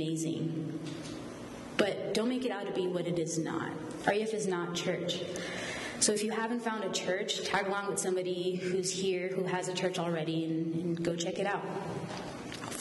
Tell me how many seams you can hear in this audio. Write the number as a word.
zero